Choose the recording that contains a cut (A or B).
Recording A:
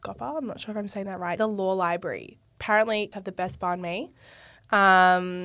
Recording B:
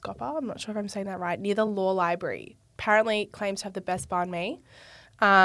A